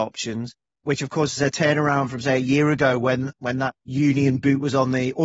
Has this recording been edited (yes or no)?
no